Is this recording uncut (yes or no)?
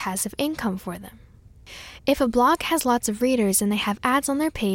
yes